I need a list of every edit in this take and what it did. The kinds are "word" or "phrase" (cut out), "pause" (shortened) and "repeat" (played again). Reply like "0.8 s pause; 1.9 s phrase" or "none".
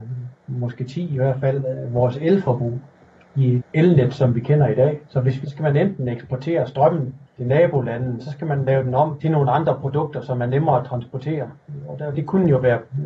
3.6 s word; 5.1 s pause; 5.4 s phrase; 7.3 s pause; 8.2 s word